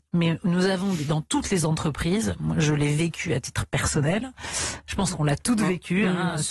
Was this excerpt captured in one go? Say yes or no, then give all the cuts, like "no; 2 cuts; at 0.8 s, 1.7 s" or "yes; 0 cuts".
yes; 0 cuts